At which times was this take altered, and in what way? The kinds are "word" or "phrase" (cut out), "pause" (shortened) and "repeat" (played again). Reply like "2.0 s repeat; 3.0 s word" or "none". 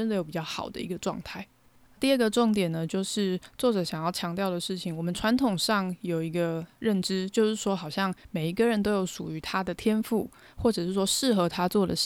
none